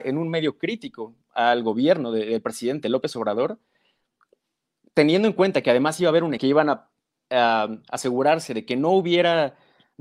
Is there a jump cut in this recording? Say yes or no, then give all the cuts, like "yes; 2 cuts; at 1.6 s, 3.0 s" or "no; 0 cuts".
yes; 1 cut; at 6.4 s